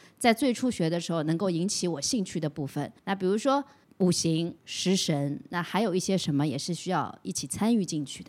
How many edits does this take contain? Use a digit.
3